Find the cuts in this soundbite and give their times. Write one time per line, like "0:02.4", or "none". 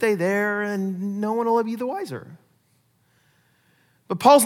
none

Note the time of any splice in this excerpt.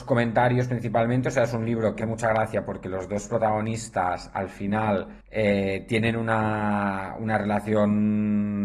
0:02.0
0:05.2

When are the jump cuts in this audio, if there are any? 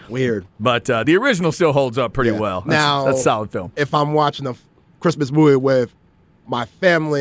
none

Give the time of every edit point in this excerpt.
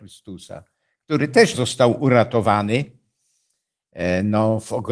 0:01.5

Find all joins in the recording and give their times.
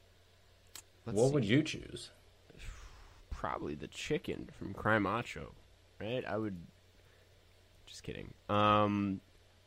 none

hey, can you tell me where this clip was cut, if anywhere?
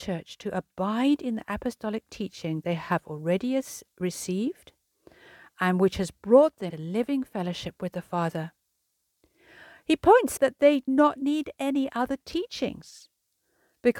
0:02.6
0:06.7
0:10.4
0:10.9

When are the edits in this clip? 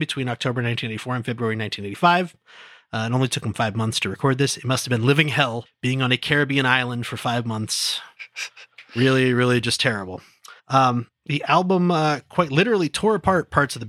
0:10.6

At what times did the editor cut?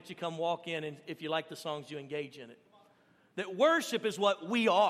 none

